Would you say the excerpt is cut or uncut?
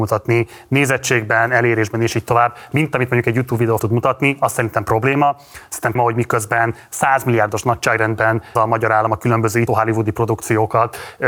cut